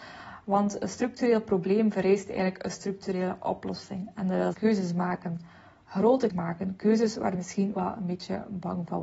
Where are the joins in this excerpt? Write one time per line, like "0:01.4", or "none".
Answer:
0:04.5
0:06.3
0:07.3
0:07.7